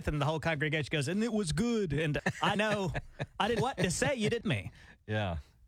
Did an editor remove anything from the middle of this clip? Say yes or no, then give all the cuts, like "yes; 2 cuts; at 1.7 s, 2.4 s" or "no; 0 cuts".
yes; 4 cuts; at 2.2 s, 2.6 s, 3.6 s, 4.4 s